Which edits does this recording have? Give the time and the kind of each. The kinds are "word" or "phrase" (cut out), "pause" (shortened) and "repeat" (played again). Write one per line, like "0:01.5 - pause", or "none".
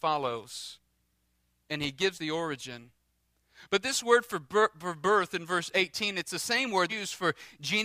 0:02.1 - word
0:06.9 - word